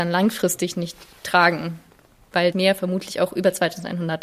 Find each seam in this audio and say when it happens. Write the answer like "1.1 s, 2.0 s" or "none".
2.5 s